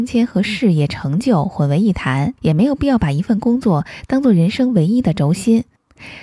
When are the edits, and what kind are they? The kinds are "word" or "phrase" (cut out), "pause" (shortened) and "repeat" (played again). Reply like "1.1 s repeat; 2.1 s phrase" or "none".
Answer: 2.4 s pause